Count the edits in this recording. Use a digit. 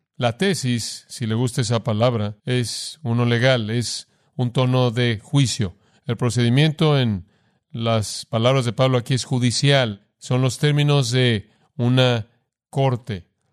1